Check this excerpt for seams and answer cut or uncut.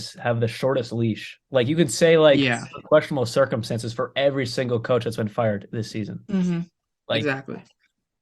uncut